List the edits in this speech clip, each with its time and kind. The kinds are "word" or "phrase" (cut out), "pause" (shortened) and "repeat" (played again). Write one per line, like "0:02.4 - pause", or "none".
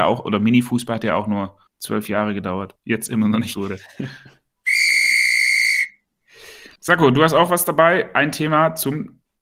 0:01.7 - pause
0:02.8 - phrase
0:03.5 - phrase
0:06.8 - pause